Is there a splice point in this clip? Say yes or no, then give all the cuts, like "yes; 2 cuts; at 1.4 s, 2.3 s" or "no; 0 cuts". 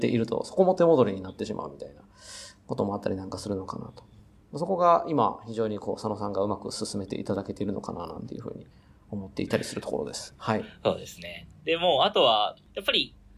no; 0 cuts